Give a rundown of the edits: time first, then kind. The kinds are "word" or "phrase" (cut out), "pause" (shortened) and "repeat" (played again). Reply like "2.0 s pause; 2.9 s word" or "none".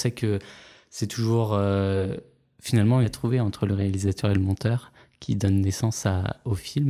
3.0 s phrase